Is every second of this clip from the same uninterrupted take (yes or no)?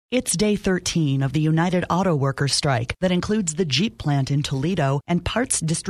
yes